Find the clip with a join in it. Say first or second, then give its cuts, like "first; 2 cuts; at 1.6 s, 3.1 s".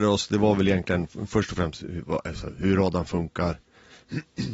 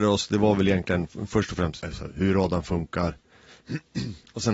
second; 1 cut; at 1.8 s